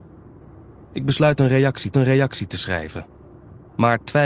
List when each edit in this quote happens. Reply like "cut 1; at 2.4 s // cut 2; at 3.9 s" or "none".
cut 1; at 1.9 s